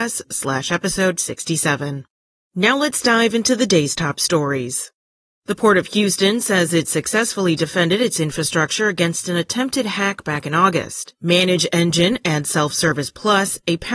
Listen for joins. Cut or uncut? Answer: uncut